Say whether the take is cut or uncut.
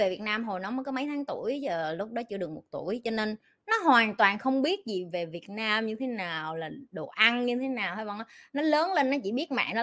uncut